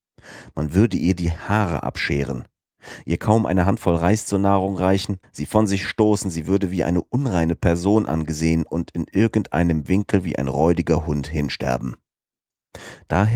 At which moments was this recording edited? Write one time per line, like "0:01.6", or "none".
0:05.2